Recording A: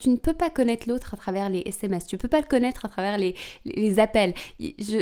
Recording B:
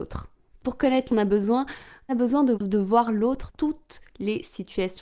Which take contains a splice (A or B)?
B